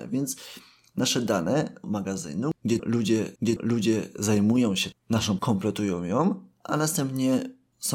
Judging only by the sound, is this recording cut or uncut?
cut